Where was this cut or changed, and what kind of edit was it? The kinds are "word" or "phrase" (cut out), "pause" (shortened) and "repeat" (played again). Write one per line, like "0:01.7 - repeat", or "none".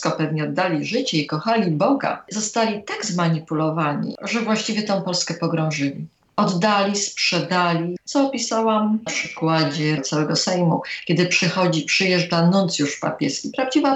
0:08.0 - word
0:09.1 - word
0:10.0 - word
0:10.3 - word